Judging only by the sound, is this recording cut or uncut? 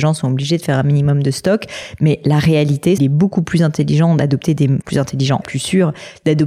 cut